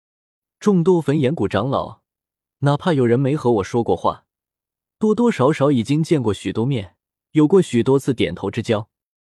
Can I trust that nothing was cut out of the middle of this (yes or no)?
yes